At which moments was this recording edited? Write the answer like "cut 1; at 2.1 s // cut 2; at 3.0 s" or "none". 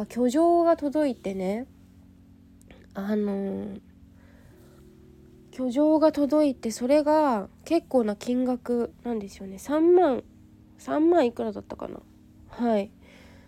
none